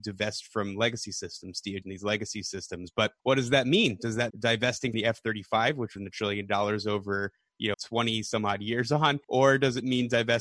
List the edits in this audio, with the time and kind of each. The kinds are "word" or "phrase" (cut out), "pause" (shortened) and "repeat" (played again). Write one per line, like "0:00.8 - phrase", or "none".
0:01.8 - phrase
0:03.2 - pause
0:04.3 - word
0:04.9 - word
0:06.0 - phrase
0:07.7 - word
0:09.2 - pause